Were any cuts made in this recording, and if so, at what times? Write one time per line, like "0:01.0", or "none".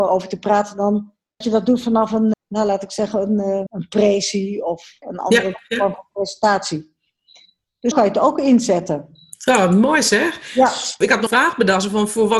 0:01.4
0:02.3
0:03.7
0:05.0
0:07.9
0:11.3